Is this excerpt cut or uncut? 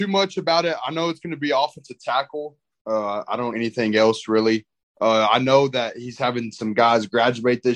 cut